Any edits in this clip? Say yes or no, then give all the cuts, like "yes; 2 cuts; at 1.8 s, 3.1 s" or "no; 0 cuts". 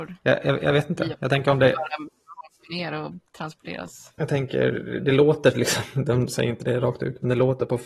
no; 0 cuts